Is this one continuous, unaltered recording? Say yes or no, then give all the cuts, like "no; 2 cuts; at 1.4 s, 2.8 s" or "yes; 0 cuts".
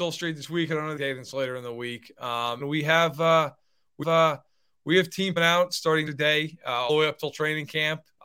no; 6 cuts; at 1.0 s, 2.6 s, 4.0 s, 5.4 s, 6.1 s, 6.9 s